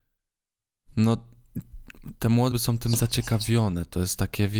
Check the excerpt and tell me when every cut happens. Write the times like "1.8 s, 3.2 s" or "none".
2.5 s